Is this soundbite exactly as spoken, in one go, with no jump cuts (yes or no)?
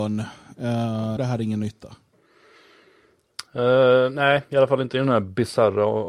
no